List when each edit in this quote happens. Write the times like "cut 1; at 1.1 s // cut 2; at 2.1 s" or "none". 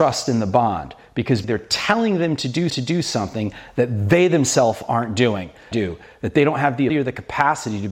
cut 1; at 1.4 s // cut 2; at 2.7 s // cut 3; at 5.7 s // cut 4; at 6.9 s